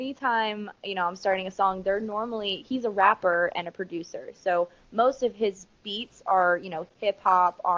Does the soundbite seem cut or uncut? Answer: uncut